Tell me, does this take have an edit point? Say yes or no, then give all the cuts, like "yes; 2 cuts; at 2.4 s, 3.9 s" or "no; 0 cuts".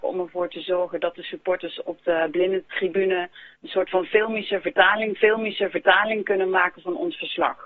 yes; 2 cuts; at 3.6 s, 5.2 s